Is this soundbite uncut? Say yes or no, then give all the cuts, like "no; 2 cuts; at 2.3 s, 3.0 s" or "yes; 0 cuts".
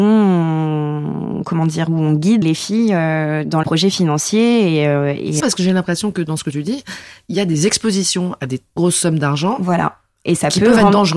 no; 4 cuts; at 2.4 s, 3.6 s, 5.4 s, 8.8 s